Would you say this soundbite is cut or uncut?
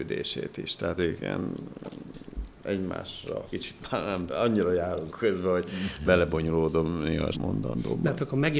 cut